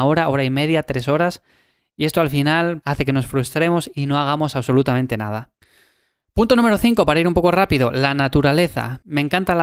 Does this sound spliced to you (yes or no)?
no